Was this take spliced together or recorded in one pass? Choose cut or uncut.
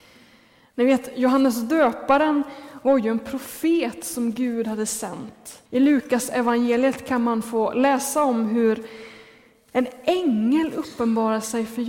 cut